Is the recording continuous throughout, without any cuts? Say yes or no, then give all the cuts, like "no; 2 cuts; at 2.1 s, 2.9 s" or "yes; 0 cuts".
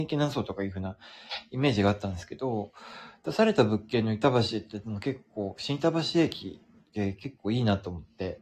no; 1 cut; at 6.7 s